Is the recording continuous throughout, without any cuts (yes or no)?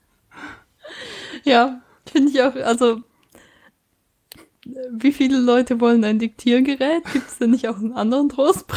yes